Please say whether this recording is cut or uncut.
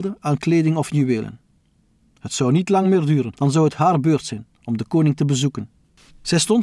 uncut